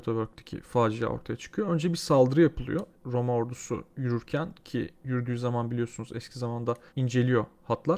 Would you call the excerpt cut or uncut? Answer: cut